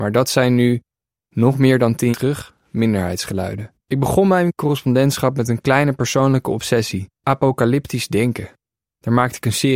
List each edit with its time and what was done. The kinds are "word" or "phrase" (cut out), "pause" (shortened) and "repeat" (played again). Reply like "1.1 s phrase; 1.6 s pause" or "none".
2.1 s word; 3.8 s pause; 7.1 s pause